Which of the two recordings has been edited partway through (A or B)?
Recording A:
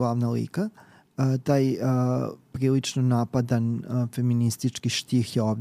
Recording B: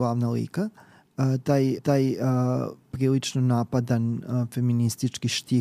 B